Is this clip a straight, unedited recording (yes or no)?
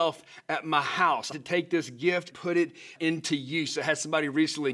no